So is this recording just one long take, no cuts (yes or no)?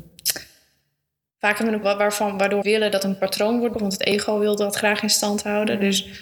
no